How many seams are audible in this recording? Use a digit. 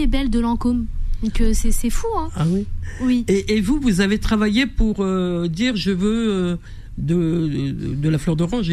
0